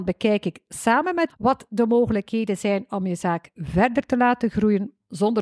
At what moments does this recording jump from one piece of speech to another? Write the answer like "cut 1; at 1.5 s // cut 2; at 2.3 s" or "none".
cut 1; at 1.3 s